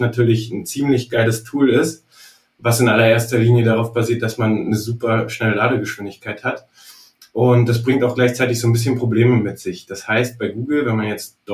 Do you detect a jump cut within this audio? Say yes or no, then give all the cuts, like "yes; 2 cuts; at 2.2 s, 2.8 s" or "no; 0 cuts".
no; 0 cuts